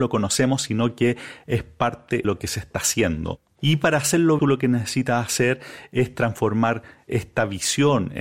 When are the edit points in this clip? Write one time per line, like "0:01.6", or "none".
0:02.2
0:04.4

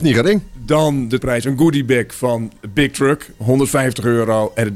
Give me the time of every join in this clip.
0:01.2

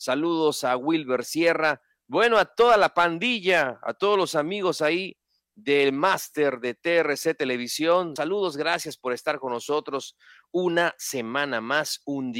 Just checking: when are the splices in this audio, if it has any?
0:08.2

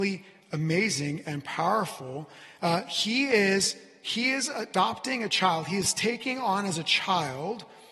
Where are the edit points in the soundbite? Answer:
none

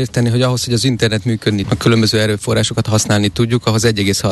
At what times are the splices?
0:01.6

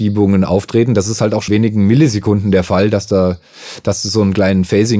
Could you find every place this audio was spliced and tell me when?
0:01.5

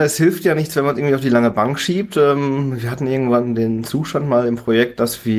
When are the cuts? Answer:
none

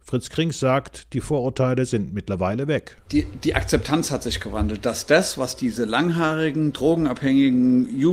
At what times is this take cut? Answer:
none

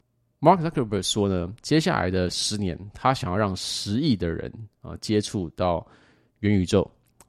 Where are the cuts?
0:01.6

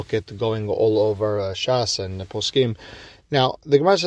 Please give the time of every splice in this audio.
none

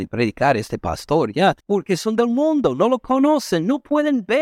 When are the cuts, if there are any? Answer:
0:01.6

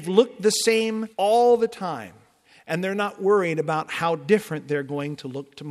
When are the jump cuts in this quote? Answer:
0:01.1

